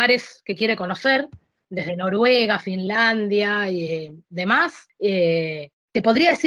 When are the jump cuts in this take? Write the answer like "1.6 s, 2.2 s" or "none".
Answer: none